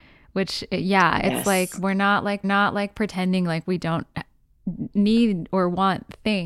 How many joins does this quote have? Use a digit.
1